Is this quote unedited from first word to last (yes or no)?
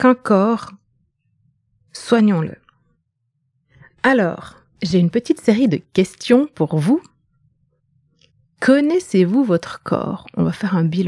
yes